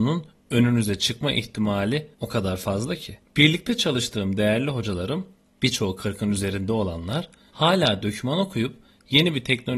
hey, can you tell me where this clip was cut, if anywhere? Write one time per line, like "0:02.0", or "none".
0:02.1